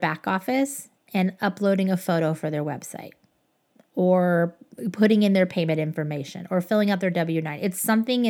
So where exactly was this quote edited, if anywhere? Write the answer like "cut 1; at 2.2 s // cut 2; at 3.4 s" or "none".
none